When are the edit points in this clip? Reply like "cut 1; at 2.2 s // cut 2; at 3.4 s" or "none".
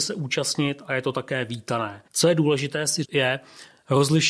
cut 1; at 2.1 s // cut 2; at 3.0 s